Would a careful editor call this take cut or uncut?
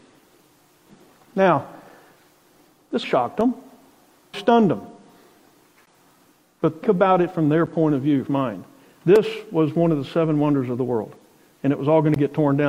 cut